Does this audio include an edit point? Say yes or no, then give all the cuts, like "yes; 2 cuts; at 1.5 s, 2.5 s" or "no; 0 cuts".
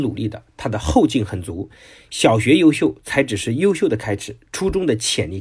no; 0 cuts